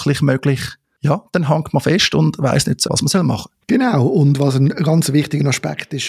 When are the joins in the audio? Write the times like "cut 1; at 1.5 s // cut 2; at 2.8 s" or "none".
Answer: cut 1; at 2.8 s // cut 2; at 3.6 s